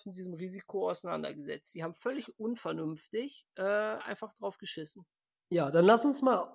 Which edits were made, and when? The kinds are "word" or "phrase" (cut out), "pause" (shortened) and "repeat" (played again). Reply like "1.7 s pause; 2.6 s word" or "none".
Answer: none